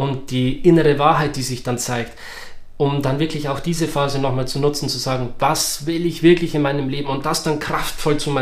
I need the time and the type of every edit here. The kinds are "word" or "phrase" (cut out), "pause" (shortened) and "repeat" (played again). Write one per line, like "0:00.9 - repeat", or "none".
none